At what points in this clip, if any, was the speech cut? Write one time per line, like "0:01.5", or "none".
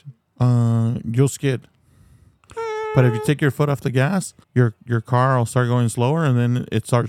0:04.4